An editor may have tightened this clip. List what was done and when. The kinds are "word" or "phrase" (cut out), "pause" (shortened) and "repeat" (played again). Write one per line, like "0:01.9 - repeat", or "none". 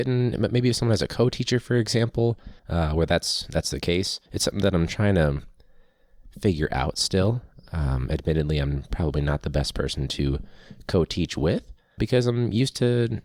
0:02.6 - pause
0:04.3 - pause
0:12.0 - word